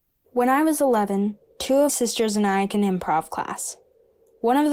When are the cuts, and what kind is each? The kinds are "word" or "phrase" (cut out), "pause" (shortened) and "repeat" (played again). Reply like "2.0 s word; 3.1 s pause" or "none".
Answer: 1.9 s word; 2.7 s word

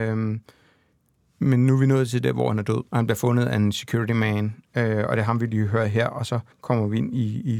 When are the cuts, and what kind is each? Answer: 2.9 s pause; 6.5 s pause

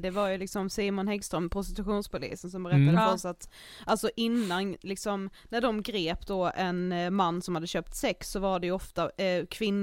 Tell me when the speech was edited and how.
none

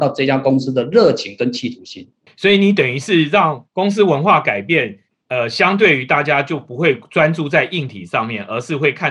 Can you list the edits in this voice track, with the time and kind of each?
3.7 s pause

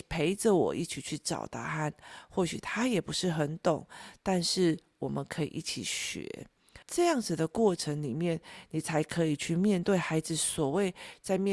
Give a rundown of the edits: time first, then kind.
6.8 s pause

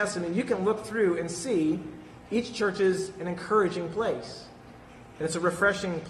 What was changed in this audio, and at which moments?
2.3 s word

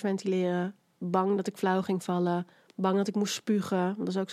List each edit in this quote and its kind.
none

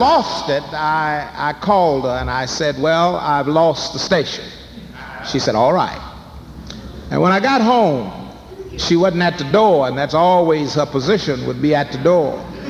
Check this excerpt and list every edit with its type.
none

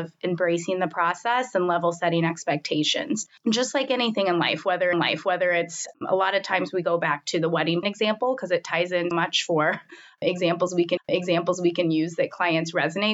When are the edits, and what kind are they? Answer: 3.4 s pause; 4.9 s repeat; 7.8 s word; 9.1 s word; 11.0 s repeat

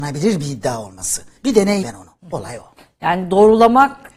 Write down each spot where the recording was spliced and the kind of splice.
1.4 s pause; 1.8 s phrase; 2.2 s pause

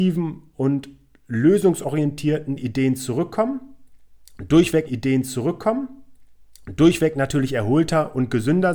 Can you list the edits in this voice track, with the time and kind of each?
4.9 s repeat

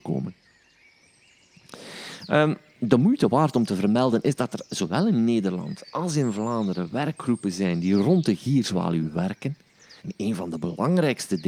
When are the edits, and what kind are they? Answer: 10.0 s pause

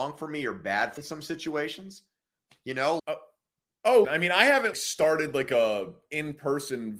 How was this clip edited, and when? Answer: 1.0 s word; 3.0 s word; 4.0 s word; 4.7 s word

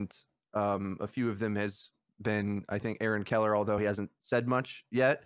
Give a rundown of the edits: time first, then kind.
none

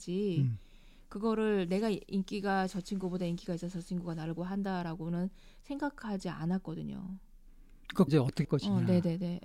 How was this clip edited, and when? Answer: 4.4 s word; 8.1 s word; 8.4 s word

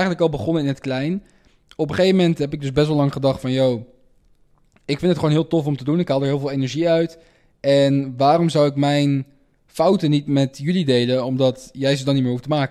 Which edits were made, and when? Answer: none

